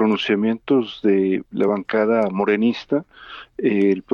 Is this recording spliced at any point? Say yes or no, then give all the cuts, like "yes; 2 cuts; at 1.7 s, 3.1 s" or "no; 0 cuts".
no; 0 cuts